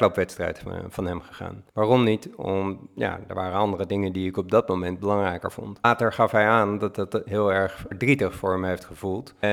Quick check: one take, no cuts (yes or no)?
no